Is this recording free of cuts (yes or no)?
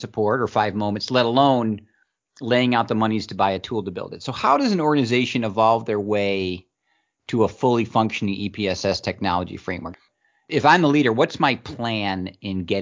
yes